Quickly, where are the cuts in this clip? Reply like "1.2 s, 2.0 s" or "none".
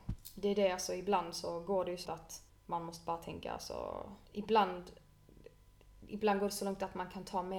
2.1 s, 2.5 s, 4.3 s